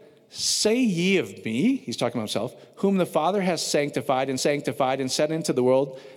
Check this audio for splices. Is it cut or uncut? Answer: cut